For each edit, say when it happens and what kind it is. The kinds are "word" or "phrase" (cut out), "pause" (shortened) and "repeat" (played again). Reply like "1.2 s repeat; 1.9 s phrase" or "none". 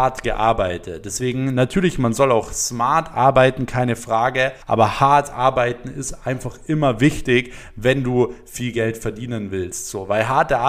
4.6 s pause